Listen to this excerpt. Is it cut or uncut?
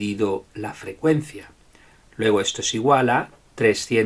uncut